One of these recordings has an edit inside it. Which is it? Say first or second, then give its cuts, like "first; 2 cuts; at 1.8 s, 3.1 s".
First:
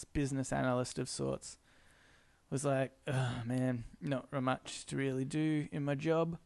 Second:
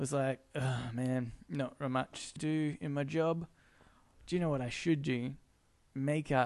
second; 1 cut; at 2.4 s